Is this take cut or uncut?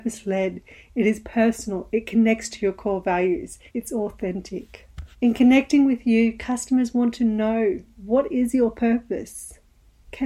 cut